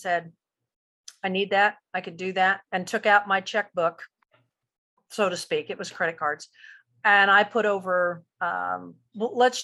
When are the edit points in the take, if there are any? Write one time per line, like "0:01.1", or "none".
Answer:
0:02.7